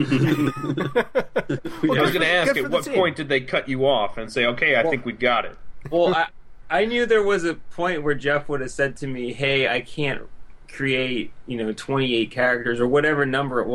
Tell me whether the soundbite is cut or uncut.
uncut